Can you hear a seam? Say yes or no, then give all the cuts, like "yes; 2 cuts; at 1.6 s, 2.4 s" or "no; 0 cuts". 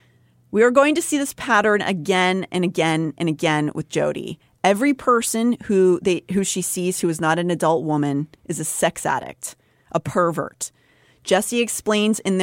no; 0 cuts